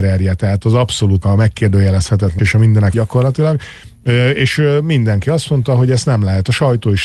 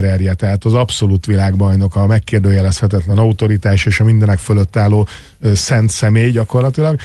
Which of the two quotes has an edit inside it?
first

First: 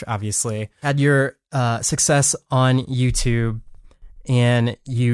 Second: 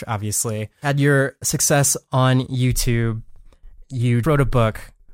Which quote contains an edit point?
second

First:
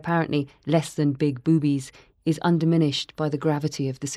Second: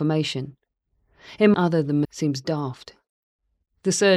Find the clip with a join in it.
second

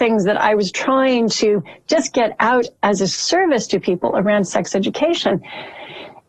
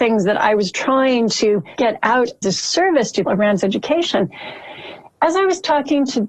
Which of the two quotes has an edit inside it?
second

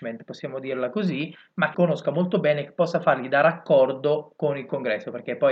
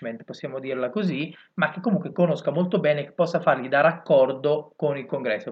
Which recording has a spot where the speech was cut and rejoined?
first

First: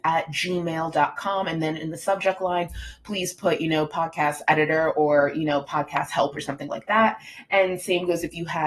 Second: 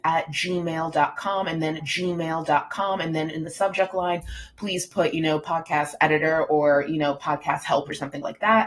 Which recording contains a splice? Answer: second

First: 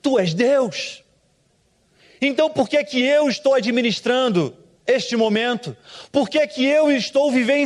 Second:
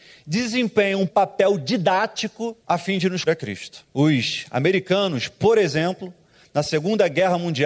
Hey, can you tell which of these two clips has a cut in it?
second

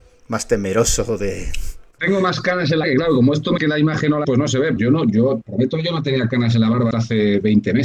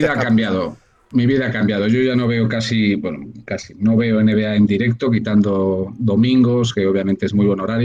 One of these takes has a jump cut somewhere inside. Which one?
first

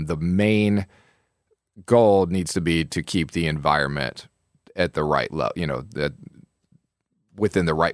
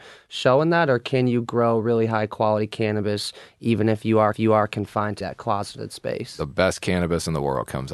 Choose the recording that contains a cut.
second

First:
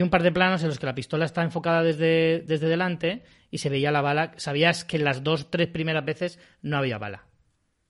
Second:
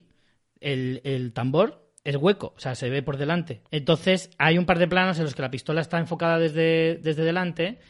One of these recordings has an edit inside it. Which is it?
second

